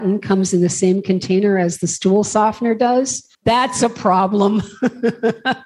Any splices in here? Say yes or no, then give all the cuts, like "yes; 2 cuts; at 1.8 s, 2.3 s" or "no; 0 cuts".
yes; 1 cut; at 3.3 s